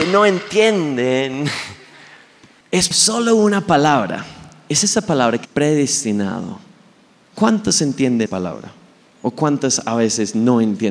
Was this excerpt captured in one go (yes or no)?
no